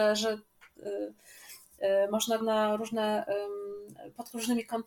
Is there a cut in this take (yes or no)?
yes